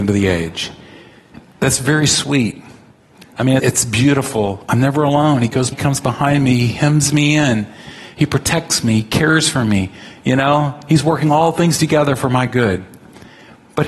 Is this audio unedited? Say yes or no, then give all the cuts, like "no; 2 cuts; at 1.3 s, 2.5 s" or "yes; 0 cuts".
no; 2 cuts; at 3.6 s, 5.7 s